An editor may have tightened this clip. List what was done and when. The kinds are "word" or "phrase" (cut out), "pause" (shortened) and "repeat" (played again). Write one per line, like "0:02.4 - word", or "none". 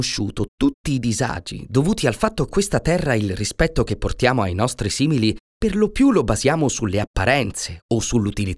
0:02.5 - word